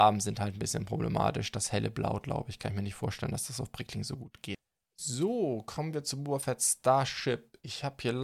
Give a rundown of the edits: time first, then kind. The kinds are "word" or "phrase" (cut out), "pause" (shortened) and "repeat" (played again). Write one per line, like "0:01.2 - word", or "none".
none